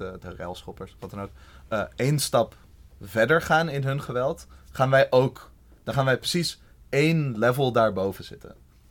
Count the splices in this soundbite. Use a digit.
0